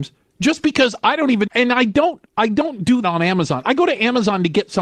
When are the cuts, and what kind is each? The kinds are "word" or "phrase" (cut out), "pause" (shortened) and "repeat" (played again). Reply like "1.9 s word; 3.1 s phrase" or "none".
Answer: 1.5 s word; 3.0 s word